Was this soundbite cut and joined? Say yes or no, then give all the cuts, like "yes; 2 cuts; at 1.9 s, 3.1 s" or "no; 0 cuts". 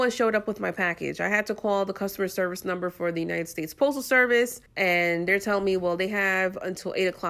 yes; 1 cut; at 4.7 s